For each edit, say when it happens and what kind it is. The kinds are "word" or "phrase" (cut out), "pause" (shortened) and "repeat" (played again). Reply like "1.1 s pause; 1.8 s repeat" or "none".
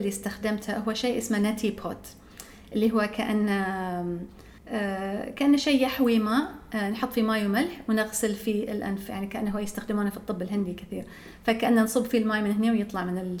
4.6 s pause